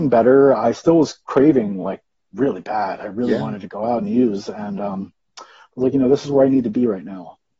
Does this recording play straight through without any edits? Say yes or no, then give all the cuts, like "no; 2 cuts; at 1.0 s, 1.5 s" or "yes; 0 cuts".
yes; 0 cuts